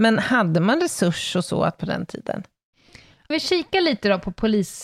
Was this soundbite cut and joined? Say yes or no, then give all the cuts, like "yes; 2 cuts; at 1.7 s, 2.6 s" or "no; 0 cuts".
yes; 2 cuts; at 1.8 s, 3.3 s